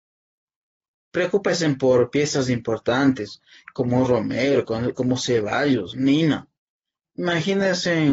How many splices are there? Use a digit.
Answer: 0